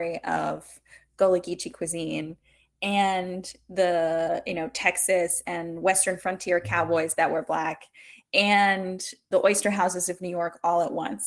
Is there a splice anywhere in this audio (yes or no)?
no